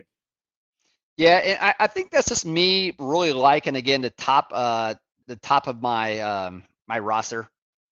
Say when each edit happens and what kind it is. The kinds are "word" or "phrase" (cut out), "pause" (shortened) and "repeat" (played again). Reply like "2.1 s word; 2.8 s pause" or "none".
5.2 s word